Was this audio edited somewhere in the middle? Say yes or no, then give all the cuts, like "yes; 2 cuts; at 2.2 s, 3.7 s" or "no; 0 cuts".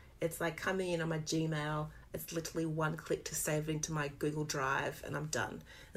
no; 0 cuts